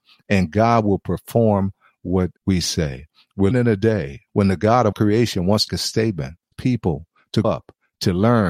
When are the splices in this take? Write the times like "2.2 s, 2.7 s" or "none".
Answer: 2.4 s, 3.5 s, 4.3 s, 4.9 s, 5.7 s, 6.5 s, 7.4 s